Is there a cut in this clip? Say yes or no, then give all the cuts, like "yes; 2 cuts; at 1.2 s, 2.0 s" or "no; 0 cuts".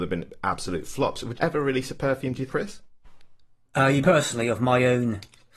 yes; 3 cuts; at 1.3 s, 2.5 s, 4.0 s